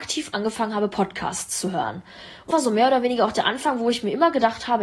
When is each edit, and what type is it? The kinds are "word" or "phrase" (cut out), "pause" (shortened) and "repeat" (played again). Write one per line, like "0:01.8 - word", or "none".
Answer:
0:02.5 - word

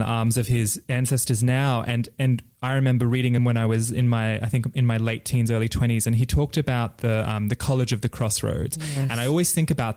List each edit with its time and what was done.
0:03.4 - phrase

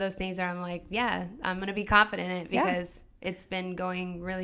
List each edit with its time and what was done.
none

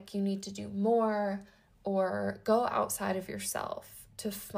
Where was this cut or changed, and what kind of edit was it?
none

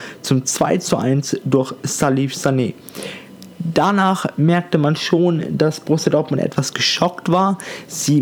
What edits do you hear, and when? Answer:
none

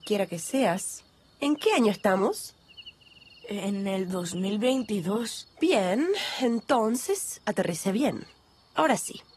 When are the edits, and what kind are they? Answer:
0:05.5 - pause

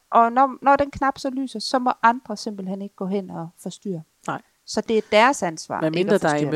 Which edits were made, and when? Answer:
none

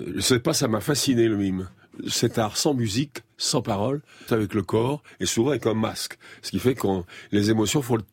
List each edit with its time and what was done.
0:04.3 - word

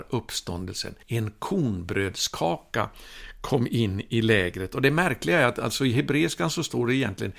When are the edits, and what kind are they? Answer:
0:01.0 - pause

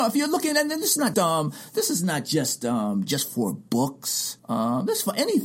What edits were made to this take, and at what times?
0:01.1 - word
0:04.4 - pause

